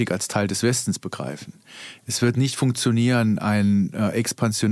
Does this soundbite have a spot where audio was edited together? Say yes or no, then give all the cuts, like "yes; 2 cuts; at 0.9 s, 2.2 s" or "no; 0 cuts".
no; 0 cuts